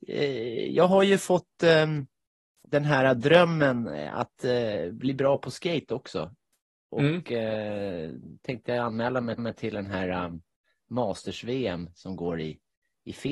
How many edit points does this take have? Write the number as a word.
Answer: one